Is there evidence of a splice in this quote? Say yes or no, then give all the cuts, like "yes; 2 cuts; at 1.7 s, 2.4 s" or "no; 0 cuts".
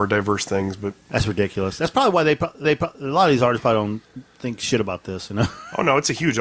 yes; 2 cuts; at 2.6 s, 4.0 s